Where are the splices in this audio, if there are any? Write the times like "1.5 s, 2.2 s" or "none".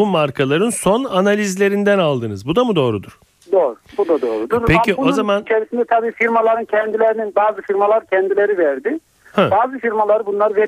none